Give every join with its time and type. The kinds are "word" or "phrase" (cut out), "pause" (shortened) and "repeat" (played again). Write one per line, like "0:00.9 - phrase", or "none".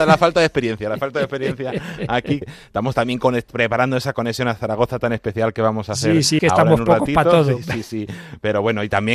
0:02.4 - word
0:06.4 - word